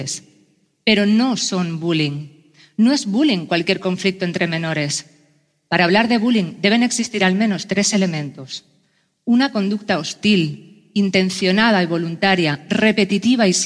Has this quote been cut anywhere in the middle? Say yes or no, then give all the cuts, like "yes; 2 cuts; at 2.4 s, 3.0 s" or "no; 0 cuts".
no; 0 cuts